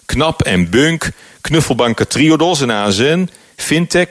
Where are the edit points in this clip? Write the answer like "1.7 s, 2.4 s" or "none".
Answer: none